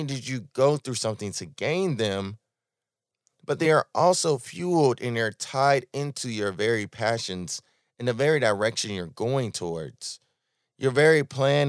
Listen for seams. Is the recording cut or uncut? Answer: uncut